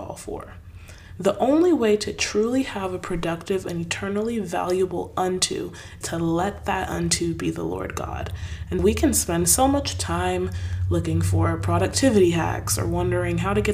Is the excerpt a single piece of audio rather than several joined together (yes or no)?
no